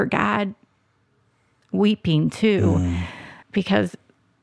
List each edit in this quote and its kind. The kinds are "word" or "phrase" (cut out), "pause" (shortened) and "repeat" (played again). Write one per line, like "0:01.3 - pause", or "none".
0:03.4 - pause